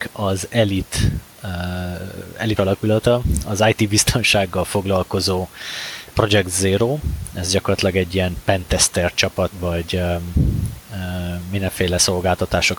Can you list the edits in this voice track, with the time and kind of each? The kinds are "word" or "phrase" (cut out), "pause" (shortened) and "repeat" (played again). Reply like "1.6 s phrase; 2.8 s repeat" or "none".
2.6 s word; 6.1 s word; 9.5 s word